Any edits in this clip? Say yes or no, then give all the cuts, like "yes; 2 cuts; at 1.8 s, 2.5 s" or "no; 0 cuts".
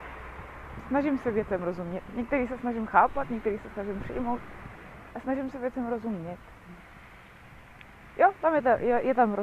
no; 0 cuts